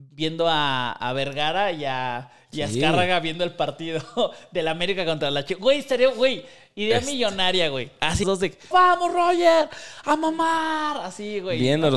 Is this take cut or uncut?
cut